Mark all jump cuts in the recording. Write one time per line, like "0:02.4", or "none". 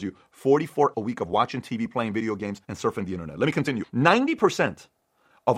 0:00.9
0:02.6